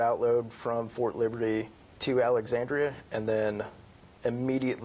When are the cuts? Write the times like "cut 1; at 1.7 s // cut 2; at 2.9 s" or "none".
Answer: cut 1; at 1.8 s